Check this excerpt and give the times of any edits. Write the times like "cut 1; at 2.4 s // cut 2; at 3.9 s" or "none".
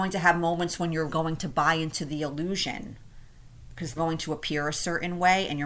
cut 1; at 1.1 s // cut 2; at 4.0 s